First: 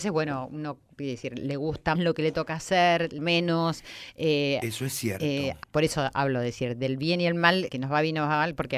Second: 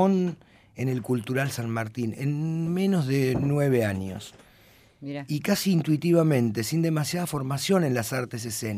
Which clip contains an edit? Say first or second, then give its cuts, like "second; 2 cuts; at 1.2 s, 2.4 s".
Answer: first; 4 cuts; at 2.0 s, 3.2 s, 5.6 s, 7.7 s